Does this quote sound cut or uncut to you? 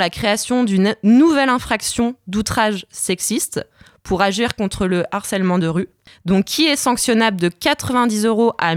uncut